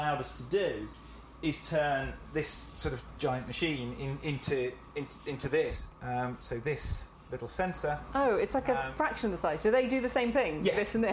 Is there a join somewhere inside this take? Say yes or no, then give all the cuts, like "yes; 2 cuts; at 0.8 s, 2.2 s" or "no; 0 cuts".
no; 0 cuts